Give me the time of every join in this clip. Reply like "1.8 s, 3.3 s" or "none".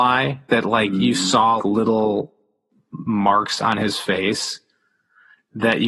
1.6 s